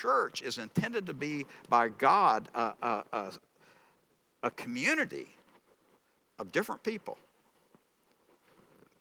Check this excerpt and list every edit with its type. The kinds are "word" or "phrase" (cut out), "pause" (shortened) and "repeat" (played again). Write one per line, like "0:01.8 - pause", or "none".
none